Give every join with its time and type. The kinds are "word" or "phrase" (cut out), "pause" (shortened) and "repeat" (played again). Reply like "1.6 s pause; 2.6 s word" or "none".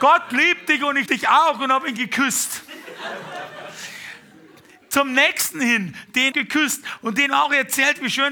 1.1 s word; 2.0 s word; 6.3 s word